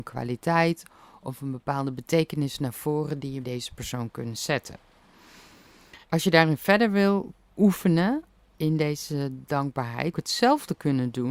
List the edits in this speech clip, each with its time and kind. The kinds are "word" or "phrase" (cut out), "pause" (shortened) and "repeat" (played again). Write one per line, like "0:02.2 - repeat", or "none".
0:03.4 - word
0:06.0 - pause
0:07.5 - pause
0:10.1 - phrase

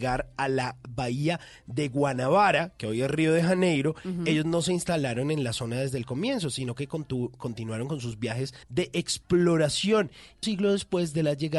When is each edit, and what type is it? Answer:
0:08.6 - pause
0:10.4 - phrase

